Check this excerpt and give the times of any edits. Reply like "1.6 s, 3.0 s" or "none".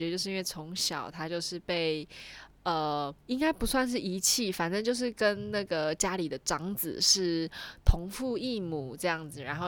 3.2 s